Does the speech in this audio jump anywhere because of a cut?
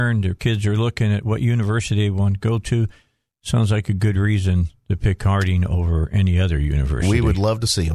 no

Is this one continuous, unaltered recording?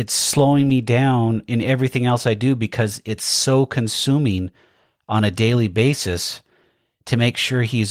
yes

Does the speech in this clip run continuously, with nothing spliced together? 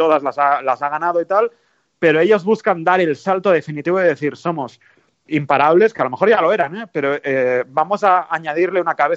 yes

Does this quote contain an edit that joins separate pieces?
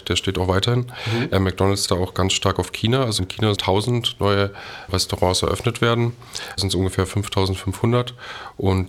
yes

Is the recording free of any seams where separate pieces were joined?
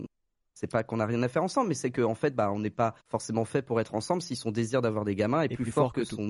no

